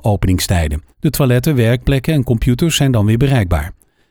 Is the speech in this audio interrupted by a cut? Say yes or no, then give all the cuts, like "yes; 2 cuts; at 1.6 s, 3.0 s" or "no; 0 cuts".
yes; 1 cut; at 0.9 s